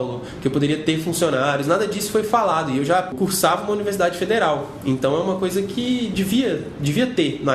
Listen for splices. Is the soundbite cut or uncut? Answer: uncut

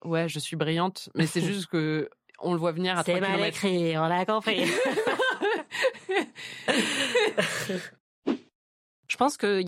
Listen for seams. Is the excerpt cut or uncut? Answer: uncut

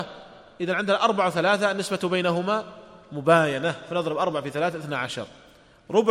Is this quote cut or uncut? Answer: uncut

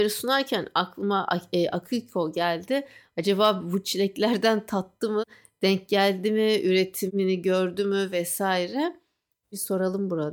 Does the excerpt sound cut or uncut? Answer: uncut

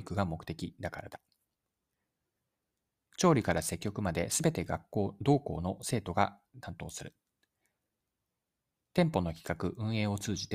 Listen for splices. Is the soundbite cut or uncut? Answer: uncut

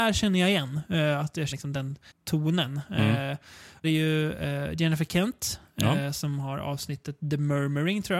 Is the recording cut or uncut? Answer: cut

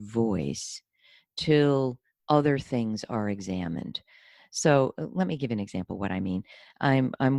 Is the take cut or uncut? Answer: uncut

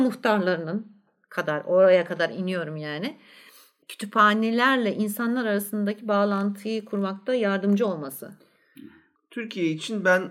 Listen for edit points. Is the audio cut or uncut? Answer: uncut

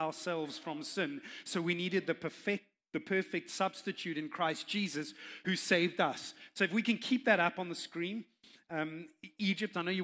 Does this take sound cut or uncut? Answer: uncut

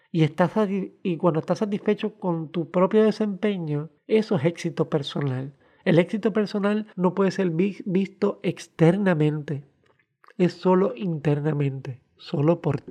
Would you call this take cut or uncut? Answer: cut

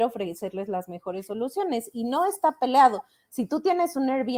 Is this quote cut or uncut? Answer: uncut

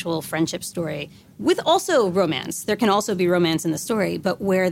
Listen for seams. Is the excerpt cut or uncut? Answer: uncut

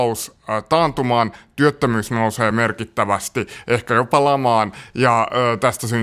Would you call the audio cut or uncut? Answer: uncut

